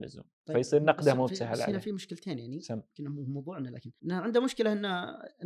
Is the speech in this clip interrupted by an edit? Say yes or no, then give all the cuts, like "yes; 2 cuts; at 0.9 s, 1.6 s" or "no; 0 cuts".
yes; 1 cut; at 4.0 s